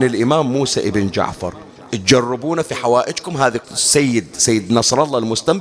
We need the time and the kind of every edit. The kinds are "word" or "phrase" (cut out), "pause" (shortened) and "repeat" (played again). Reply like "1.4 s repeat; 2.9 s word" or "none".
3.6 s word